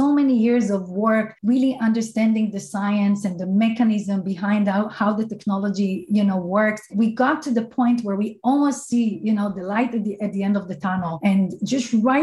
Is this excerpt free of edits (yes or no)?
no